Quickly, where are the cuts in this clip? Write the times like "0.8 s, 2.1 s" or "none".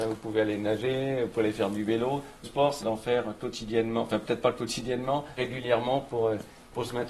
2.4 s, 2.8 s, 5.4 s